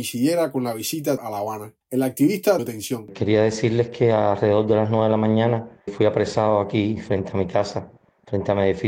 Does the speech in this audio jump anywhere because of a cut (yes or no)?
yes